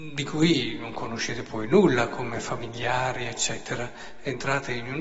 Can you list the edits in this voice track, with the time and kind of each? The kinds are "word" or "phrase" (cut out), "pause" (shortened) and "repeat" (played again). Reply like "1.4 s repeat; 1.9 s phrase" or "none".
none